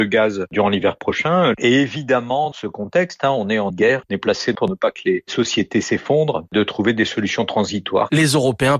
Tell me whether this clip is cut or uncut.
cut